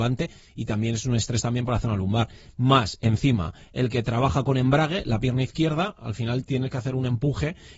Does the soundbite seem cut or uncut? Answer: uncut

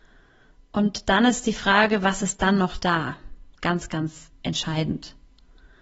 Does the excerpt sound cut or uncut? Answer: uncut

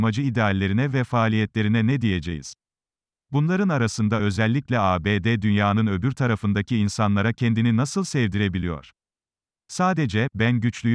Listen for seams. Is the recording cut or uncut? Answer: uncut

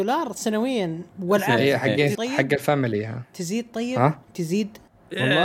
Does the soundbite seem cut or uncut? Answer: cut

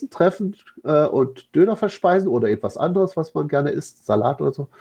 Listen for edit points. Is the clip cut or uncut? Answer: uncut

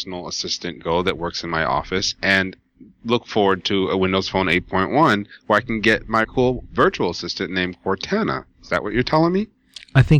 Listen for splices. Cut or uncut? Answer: cut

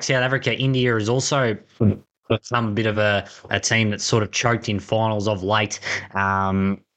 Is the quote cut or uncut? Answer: uncut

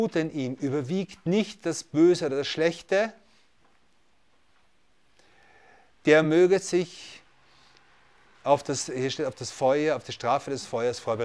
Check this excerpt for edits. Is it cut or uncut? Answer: uncut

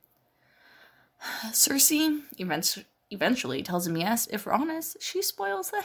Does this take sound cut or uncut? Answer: cut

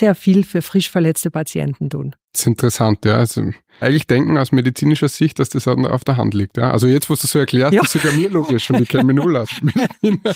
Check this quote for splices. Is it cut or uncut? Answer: cut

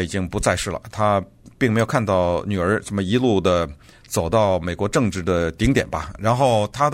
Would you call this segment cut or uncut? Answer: uncut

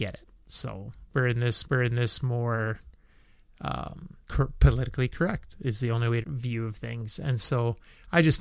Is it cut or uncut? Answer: cut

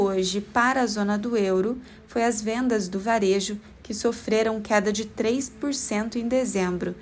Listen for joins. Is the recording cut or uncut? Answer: uncut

